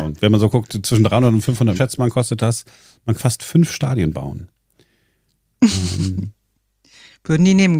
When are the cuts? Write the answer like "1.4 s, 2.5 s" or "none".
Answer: 1.8 s, 3.2 s